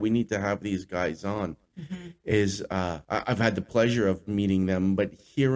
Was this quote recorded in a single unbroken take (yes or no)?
no